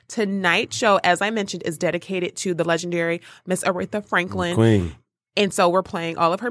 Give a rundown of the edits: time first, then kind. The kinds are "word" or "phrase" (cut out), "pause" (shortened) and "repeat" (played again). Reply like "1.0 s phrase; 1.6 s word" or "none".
none